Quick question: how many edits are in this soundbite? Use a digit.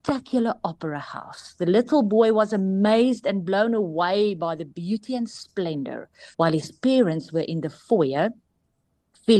1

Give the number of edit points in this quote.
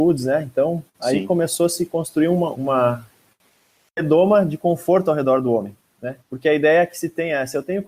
2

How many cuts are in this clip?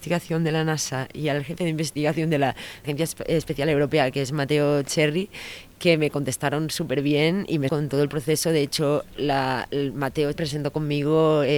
3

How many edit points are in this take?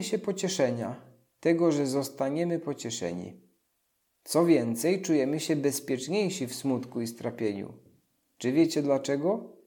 0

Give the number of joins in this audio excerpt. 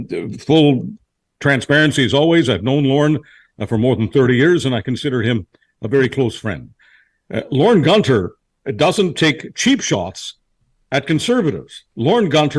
0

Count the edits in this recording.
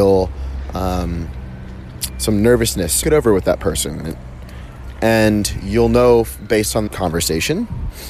2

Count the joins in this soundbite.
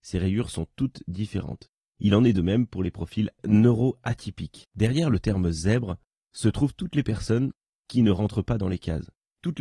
1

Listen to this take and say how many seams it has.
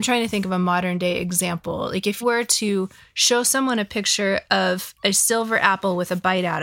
1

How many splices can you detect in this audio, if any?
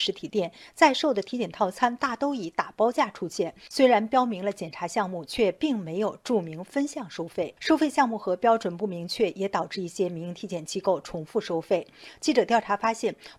1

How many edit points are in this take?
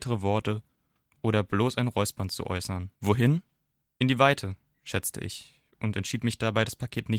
1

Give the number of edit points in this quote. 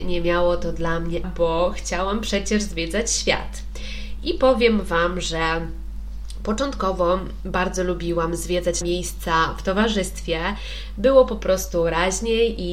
2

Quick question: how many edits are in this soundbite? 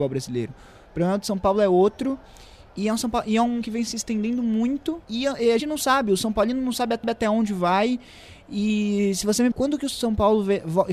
6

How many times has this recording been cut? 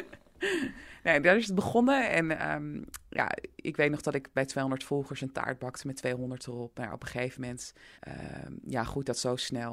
1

